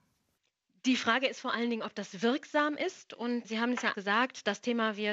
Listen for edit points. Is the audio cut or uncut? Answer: cut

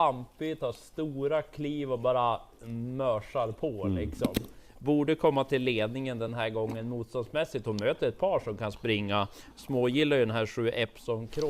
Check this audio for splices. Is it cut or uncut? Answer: uncut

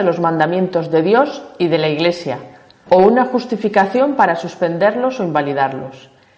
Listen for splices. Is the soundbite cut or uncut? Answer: uncut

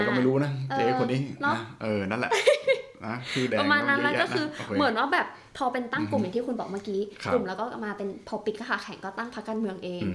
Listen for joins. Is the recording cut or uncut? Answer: uncut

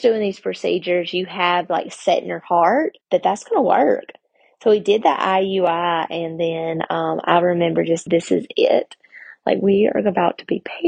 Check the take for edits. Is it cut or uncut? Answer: cut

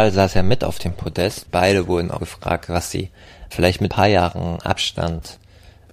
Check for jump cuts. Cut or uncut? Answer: cut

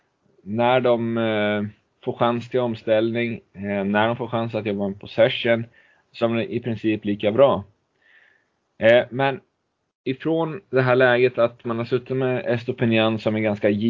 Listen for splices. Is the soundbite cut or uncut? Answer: cut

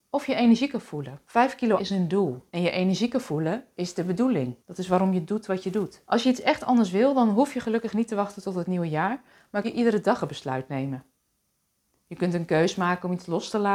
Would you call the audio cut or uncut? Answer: cut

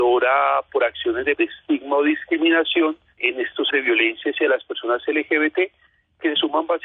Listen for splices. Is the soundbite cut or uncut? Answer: cut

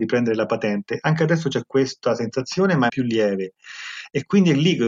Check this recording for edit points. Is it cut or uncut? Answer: cut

